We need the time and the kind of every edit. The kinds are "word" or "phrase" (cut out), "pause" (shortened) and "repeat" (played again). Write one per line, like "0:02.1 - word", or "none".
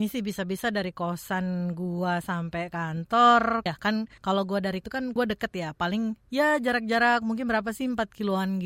0:03.7 - phrase
0:04.8 - word
0:05.2 - phrase